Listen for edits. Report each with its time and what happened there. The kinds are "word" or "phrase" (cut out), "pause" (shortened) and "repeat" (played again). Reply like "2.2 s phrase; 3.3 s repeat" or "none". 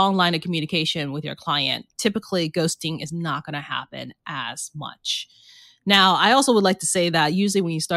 none